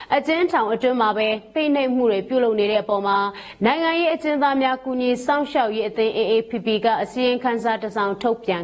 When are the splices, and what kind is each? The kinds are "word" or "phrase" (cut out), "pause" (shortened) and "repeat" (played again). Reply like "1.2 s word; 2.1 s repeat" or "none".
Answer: none